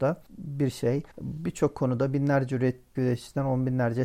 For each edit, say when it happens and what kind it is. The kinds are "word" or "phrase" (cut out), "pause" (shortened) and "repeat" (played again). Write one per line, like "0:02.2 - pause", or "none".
0:01.1 - pause
0:02.9 - word